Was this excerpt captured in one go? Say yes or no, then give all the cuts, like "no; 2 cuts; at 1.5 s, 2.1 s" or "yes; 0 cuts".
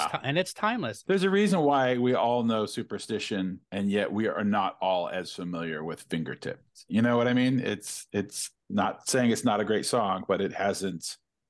no; 1 cut; at 3.6 s